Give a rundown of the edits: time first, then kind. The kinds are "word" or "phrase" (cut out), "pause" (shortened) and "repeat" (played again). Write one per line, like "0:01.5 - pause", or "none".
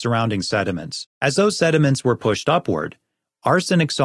0:01.1 - pause